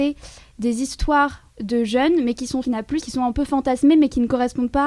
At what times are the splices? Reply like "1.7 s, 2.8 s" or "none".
1.5 s, 2.6 s, 3.0 s